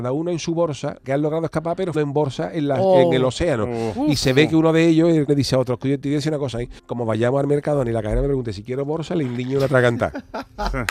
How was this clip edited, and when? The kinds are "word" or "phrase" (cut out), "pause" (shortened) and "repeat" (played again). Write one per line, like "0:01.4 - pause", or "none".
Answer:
0:01.0 - word
0:01.9 - word
0:05.3 - word
0:06.8 - pause